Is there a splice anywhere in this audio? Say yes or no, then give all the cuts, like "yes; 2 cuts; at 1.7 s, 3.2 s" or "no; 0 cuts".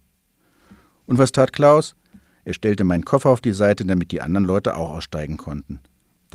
no; 0 cuts